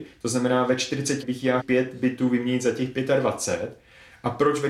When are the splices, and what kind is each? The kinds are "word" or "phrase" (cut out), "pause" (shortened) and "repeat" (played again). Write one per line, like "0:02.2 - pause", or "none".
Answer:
0:01.2 - word
0:01.6 - phrase